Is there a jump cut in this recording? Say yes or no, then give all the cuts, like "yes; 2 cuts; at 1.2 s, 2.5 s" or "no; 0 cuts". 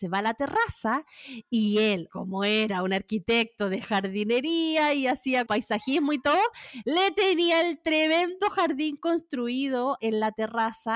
yes; 3 cuts; at 2.1 s, 5.5 s, 10.0 s